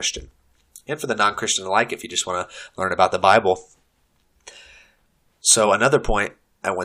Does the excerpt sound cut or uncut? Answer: uncut